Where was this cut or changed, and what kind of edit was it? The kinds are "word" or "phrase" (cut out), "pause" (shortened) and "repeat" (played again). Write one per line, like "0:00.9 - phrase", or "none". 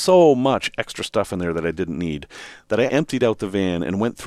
0:02.9 - word